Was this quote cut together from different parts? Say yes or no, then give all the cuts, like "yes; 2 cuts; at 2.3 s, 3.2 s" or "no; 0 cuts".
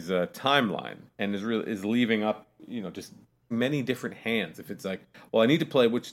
yes; 2 cuts; at 1.1 s, 3.5 s